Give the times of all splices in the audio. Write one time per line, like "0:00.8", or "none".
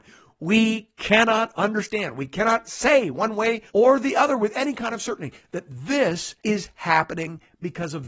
0:03.7
0:06.4